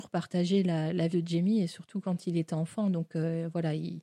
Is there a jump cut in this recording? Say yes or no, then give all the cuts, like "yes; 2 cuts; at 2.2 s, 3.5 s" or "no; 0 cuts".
yes; 1 cut; at 1.1 s